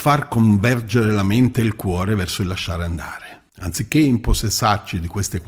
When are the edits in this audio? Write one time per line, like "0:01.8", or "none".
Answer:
0:03.5